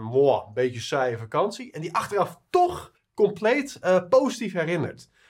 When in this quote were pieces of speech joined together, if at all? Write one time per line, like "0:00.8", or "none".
0:02.9